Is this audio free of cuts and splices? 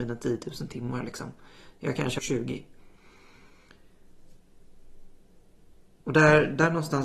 no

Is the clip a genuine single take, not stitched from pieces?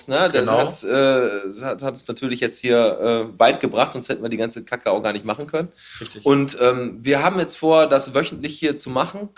yes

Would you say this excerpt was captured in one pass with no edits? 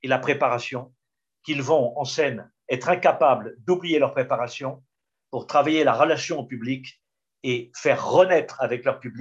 yes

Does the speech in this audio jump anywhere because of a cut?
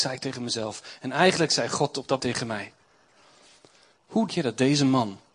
yes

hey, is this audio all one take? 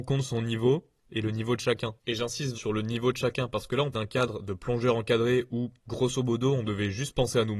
no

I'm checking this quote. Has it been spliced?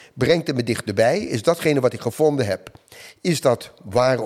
no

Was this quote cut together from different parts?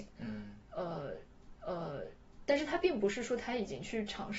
yes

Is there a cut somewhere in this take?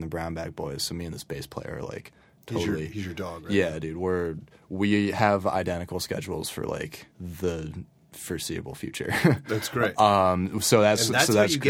yes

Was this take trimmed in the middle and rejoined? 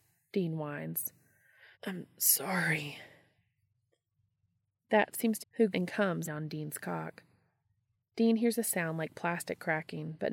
yes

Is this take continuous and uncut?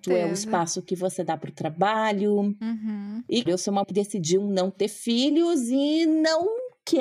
no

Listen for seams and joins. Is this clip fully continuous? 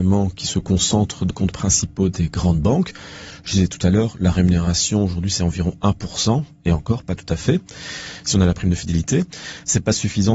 no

